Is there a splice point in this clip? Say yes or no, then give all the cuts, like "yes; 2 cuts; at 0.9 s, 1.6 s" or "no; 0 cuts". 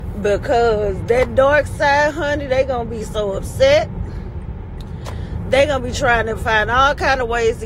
no; 0 cuts